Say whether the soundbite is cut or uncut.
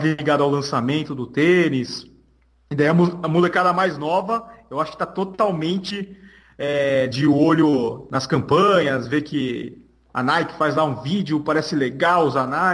uncut